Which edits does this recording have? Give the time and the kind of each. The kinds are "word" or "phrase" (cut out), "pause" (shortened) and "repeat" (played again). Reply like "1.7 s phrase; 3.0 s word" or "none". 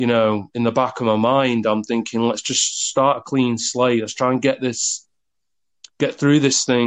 none